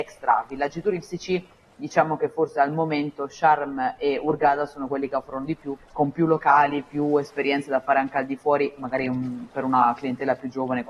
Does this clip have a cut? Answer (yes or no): no